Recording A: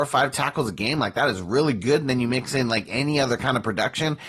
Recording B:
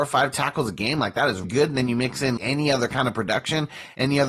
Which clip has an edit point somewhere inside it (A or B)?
B